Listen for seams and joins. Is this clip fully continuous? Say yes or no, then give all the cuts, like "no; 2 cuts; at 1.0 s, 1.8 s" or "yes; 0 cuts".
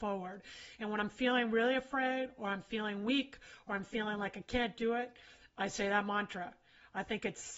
yes; 0 cuts